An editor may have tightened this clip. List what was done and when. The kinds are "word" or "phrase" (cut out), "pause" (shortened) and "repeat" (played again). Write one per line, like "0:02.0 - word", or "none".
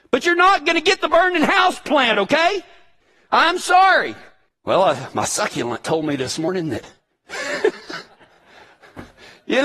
none